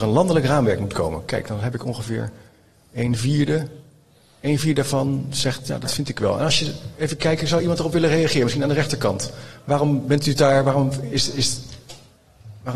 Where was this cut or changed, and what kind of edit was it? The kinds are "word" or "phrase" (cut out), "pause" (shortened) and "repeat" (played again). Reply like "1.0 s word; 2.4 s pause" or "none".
none